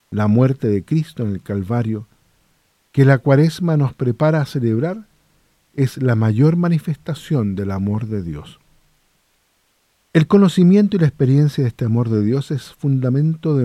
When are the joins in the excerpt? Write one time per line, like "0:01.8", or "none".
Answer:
none

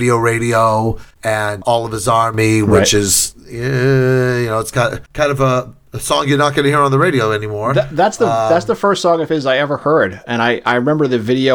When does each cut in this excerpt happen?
0:01.1
0:05.1

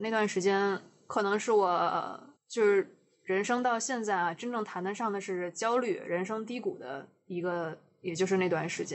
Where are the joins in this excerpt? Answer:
0:02.4

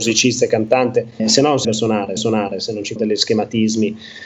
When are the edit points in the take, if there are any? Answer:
0:01.2
0:01.6
0:02.2
0:03.0

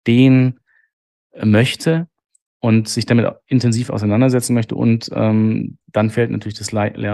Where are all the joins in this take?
0:05.8

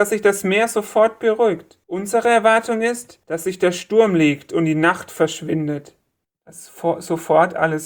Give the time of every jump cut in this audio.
0:01.8
0:03.2
0:06.2

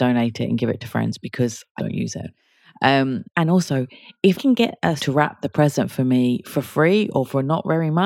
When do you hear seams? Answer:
0:01.8
0:03.3
0:04.4
0:05.0

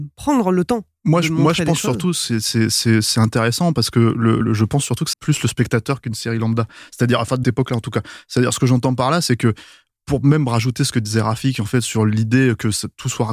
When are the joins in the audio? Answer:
0:04.4
0:05.1
0:07.4

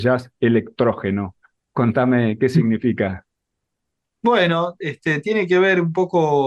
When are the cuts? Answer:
none

